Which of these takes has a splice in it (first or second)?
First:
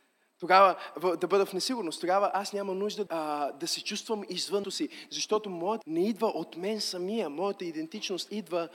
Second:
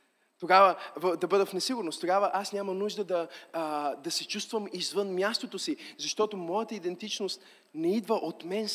first